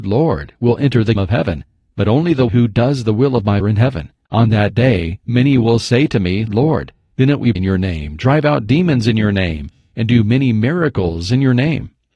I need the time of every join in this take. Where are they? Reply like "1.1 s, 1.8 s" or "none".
1.2 s, 2.5 s, 3.6 s, 6.5 s, 7.5 s